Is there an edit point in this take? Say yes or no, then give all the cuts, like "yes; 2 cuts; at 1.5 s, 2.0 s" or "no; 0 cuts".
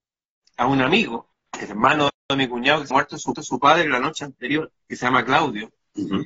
yes; 4 cuts; at 1.3 s, 2.2 s, 2.9 s, 3.3 s